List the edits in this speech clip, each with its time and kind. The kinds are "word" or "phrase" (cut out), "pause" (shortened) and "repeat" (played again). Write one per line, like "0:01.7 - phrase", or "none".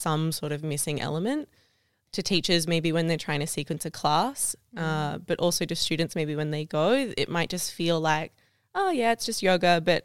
none